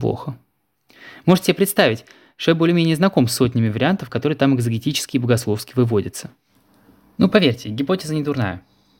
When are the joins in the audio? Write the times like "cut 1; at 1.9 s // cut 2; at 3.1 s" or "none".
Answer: none